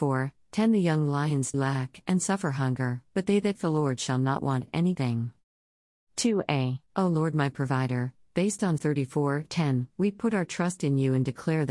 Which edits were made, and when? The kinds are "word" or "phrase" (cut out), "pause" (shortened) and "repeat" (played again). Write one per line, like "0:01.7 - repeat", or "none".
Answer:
0:01.5 - word
0:03.1 - pause
0:03.5 - word
0:04.9 - word
0:06.9 - pause
0:08.8 - word